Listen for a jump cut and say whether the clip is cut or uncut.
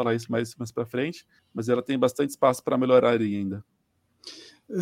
cut